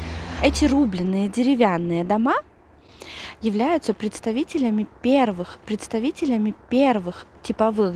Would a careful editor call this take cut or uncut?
cut